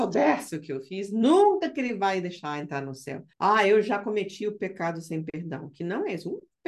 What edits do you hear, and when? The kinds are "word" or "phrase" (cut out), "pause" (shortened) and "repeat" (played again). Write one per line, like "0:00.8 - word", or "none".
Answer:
0:03.3 - pause

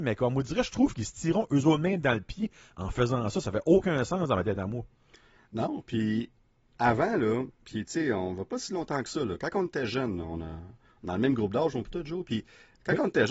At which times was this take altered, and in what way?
none

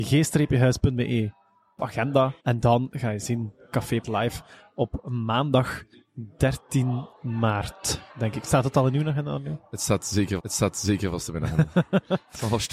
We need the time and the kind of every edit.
0:01.8 - phrase
0:02.4 - pause
0:04.0 - word
0:08.1 - pause
0:10.4 - repeat

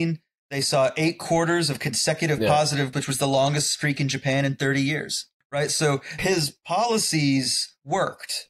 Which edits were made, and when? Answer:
0:02.9 - word
0:06.2 - word

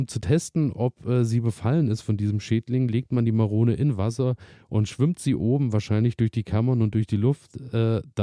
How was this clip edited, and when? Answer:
none

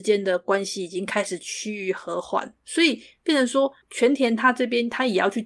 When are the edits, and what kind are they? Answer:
0:02.6 - pause
0:03.8 - pause

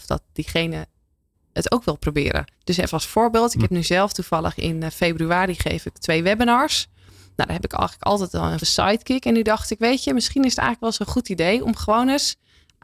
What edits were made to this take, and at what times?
0:01.3 - word
0:02.5 - pause
0:08.6 - word

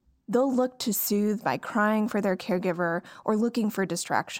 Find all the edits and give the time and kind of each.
none

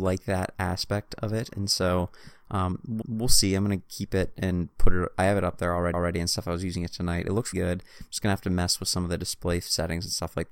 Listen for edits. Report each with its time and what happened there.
0:03.0 - repeat
0:05.9 - repeat
0:07.5 - word

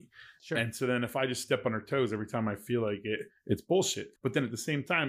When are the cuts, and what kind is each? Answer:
0:04.2 - pause

